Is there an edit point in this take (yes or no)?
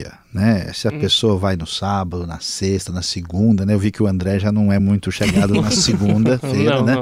no